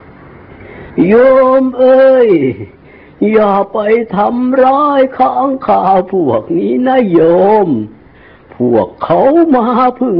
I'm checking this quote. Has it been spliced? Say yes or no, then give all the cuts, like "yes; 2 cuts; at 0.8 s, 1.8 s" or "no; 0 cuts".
no; 0 cuts